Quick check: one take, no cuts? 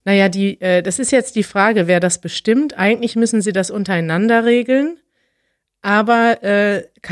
yes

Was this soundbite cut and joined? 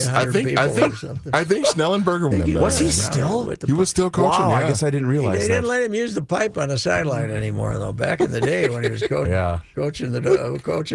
yes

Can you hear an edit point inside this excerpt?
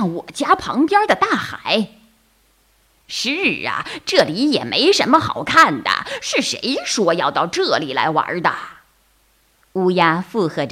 no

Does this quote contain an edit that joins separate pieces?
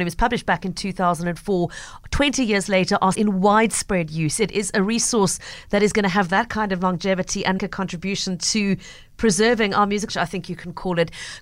yes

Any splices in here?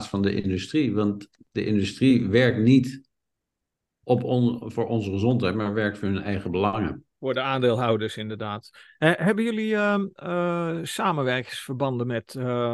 no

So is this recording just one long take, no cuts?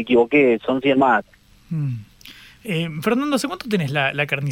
yes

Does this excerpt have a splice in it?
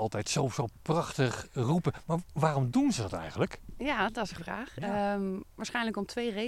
yes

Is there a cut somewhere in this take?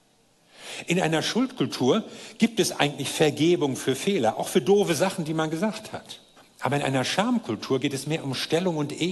yes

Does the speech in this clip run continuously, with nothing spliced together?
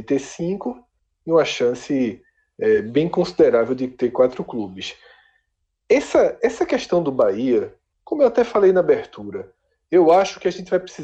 yes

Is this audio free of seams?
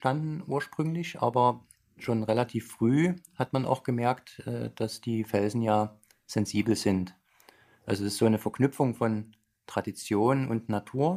yes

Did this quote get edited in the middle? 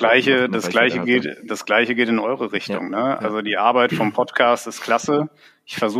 no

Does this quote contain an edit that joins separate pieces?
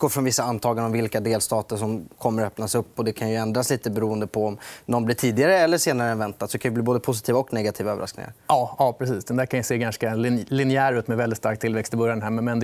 no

